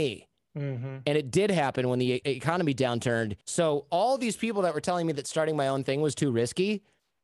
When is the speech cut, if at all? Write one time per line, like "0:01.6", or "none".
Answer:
0:02.2
0:03.4

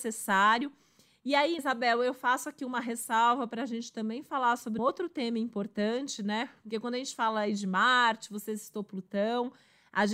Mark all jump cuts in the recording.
0:01.6
0:04.8

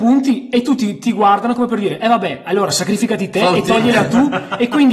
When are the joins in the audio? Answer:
none

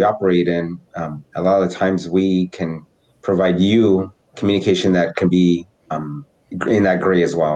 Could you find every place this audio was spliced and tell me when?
0:04.3

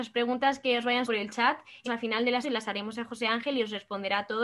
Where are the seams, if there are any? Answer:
0:01.0
0:01.8
0:02.4

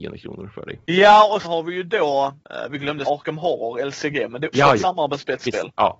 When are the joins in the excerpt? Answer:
0:01.4
0:03.1
0:04.5

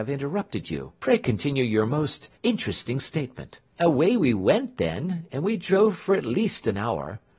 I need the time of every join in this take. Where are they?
0:01.0
0:02.3
0:03.7

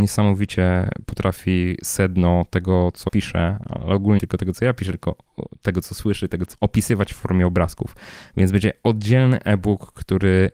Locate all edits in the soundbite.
0:03.1
0:04.2
0:06.5

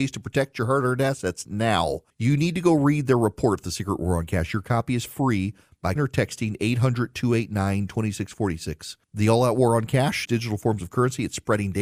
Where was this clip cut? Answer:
0:02.1
0:06.0
0:09.0
0:10.2

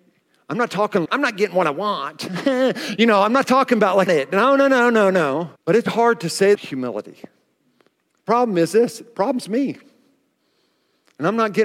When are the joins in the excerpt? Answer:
0:01.0
0:04.1
0:05.6
0:05.9
0:06.5
0:07.9

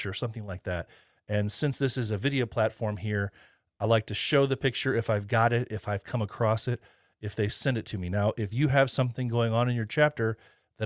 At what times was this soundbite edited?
none

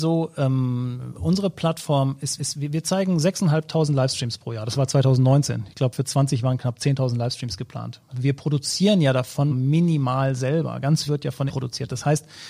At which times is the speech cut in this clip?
0:02.4
0:08.1
0:09.5
0:11.1
0:11.5

